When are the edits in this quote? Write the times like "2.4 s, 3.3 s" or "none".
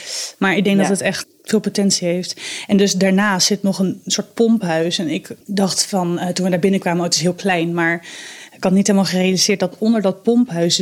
1.2 s, 5.4 s

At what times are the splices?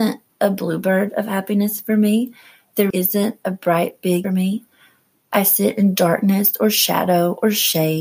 2.9 s, 4.2 s

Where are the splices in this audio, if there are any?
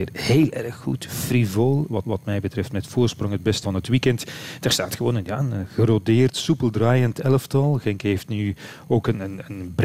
2.0 s, 3.6 s

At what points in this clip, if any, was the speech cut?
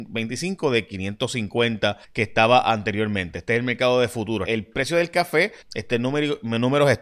2.0 s, 4.4 s, 5.6 s

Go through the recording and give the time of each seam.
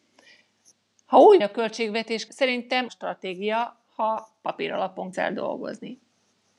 1.4 s, 2.3 s, 2.9 s, 5.1 s

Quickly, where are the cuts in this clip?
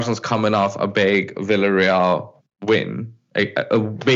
2.4 s

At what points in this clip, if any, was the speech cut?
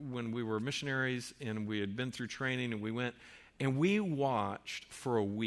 none

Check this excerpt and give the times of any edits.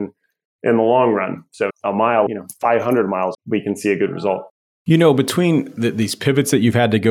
1.7 s, 2.3 s, 3.3 s

